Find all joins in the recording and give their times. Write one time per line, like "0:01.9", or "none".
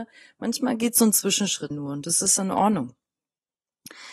0:01.7